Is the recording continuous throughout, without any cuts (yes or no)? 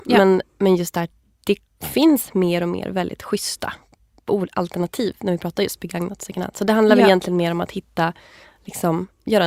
yes